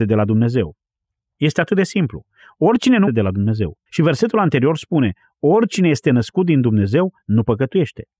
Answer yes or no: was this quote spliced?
yes